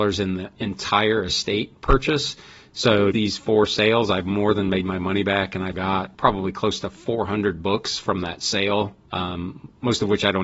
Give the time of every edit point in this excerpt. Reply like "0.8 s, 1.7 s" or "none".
3.1 s, 5.7 s, 6.1 s